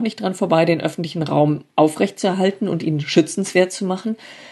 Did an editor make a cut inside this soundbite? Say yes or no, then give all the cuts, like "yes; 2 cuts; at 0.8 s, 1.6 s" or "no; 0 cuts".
no; 0 cuts